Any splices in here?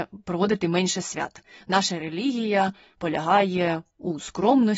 no; 0 cuts

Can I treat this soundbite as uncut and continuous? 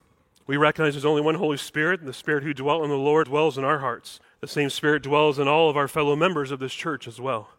no; 2 cuts; at 3.2 s, 4.2 s

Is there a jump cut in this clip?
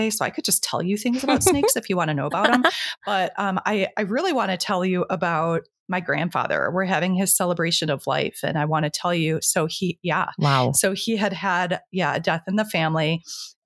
no; 0 cuts

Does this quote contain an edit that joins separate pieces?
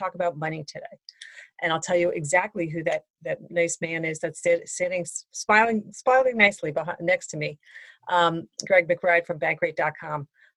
no; 0 cuts

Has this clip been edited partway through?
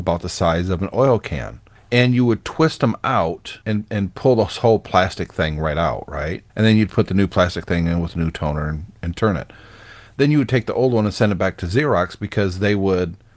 yes; 3 cuts; at 1.8 s, 3.6 s, 6.5 s

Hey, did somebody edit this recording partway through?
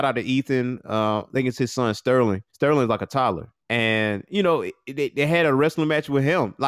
yes; 2 cuts; at 2.5 s, 3.6 s

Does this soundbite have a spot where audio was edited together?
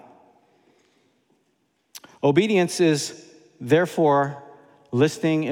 no; 0 cuts

